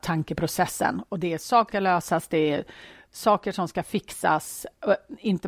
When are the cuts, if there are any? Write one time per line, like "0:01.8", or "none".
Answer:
0:01.7